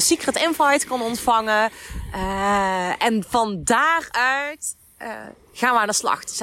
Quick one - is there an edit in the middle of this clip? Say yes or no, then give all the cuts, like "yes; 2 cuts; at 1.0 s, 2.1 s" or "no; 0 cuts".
no; 0 cuts